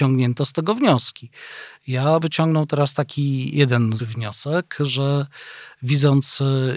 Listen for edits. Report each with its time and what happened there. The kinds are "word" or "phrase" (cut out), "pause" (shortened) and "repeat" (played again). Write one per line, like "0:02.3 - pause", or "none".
0:02.2 - word
0:04.0 - word